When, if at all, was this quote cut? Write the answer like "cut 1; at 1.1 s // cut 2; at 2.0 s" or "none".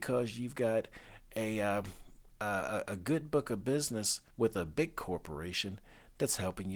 cut 1; at 4.3 s